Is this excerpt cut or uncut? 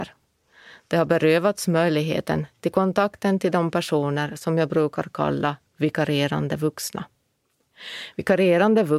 uncut